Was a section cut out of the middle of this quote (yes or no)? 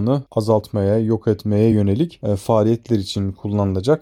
no